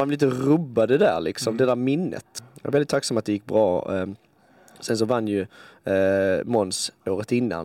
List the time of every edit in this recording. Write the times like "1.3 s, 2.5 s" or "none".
none